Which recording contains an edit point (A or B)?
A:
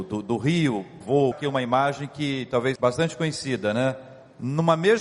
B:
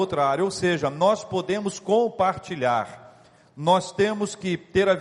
A